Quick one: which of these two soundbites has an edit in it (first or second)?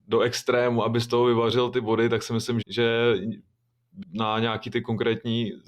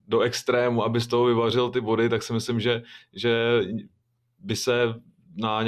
first